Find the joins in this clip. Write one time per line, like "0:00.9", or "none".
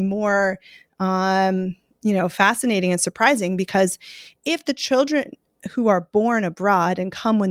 none